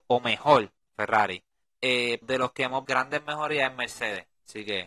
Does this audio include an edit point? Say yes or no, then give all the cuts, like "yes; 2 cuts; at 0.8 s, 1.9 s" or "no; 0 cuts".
yes; 3 cuts; at 0.9 s, 2.2 s, 2.8 s